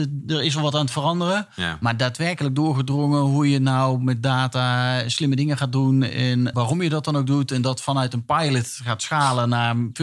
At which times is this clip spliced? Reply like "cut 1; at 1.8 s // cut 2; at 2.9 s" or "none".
cut 1; at 6.5 s